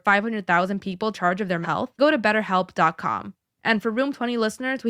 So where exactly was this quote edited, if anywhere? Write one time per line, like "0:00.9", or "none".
0:01.1
0:01.6
0:02.0